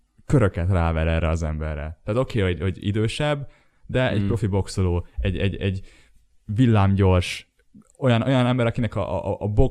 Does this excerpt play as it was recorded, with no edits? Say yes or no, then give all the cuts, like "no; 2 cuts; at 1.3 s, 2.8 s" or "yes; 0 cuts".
yes; 0 cuts